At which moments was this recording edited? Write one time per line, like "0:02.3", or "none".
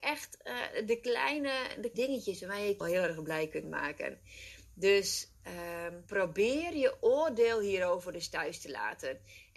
0:01.9
0:02.8
0:06.1